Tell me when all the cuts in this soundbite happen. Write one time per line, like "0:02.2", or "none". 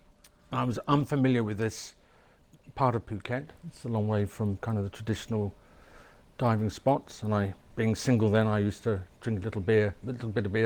0:06.2